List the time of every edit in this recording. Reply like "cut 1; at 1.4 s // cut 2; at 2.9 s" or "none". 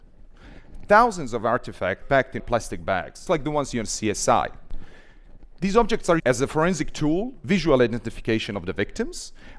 cut 1; at 2.0 s // cut 2; at 2.4 s // cut 3; at 3.3 s // cut 4; at 3.7 s // cut 5; at 6.2 s // cut 6; at 7.4 s